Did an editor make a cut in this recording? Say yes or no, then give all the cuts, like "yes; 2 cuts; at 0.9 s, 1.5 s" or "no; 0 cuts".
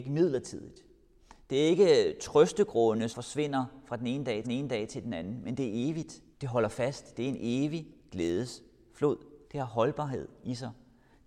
yes; 4 cuts; at 3.1 s, 4.4 s, 6.3 s, 9.4 s